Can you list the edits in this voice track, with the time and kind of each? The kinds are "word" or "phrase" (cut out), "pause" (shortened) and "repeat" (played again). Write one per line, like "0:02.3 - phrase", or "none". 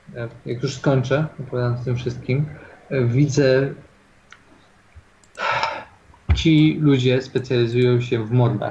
none